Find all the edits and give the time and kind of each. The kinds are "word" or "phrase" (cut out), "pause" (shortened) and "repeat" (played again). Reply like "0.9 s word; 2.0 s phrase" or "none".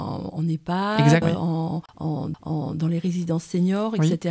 1.2 s word; 2.3 s repeat